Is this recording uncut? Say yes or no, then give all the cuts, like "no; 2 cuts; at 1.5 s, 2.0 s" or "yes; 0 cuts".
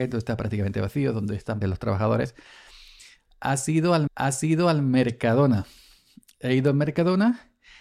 no; 2 cuts; at 1.6 s, 4.1 s